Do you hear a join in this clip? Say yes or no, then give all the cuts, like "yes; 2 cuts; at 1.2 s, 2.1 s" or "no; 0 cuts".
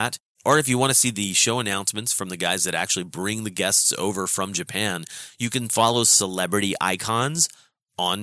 no; 0 cuts